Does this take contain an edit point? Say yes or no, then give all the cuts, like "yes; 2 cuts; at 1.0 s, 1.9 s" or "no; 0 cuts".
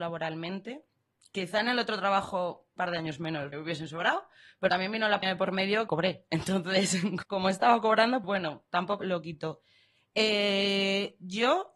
yes; 8 cuts; at 2.8 s, 3.5 s, 4.7 s, 5.2 s, 5.9 s, 7.2 s, 8.2 s, 9.0 s